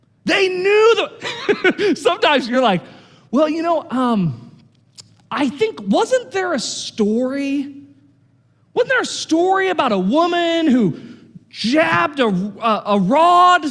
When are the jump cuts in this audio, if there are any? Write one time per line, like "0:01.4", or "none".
none